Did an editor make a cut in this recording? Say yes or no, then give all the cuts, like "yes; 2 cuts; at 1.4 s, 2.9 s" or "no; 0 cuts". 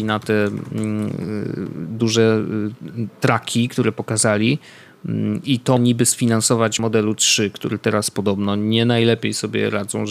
yes; 2 cuts; at 5.8 s, 6.8 s